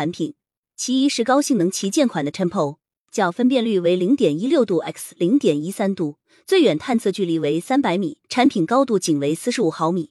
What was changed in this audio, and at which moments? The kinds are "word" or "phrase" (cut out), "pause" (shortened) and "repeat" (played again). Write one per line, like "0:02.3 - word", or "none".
0:08.2 - pause